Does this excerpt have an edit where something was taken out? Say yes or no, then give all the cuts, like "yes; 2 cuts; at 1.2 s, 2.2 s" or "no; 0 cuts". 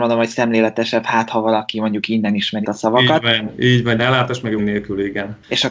yes; 3 cuts; at 2.6 s, 4.0 s, 4.6 s